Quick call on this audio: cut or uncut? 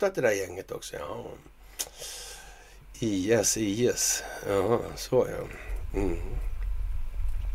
uncut